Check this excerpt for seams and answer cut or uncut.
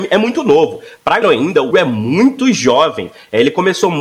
cut